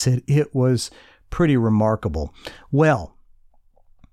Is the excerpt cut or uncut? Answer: uncut